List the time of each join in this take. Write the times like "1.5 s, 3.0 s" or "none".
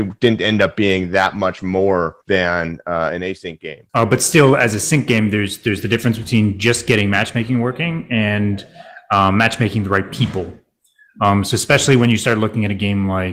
2.2 s, 3.9 s